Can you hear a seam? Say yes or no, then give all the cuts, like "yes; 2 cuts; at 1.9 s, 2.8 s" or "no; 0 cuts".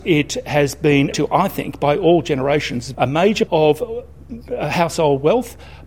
yes; 3 cuts; at 1.1 s, 2.9 s, 3.5 s